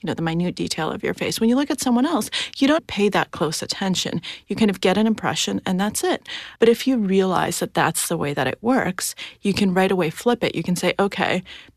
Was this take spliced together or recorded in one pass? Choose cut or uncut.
cut